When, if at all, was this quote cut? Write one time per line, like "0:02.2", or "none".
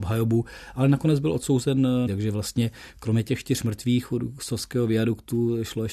0:02.1